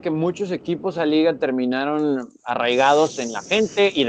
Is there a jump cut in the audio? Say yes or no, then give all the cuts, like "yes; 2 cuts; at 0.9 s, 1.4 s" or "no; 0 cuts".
yes; 1 cut; at 1.0 s